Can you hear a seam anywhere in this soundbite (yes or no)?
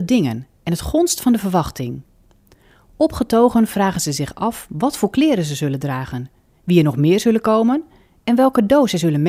no